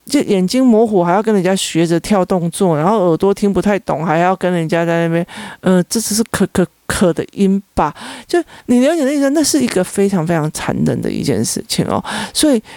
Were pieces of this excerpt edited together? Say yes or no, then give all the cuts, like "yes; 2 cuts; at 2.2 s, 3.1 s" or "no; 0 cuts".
yes; 1 cut; at 8.6 s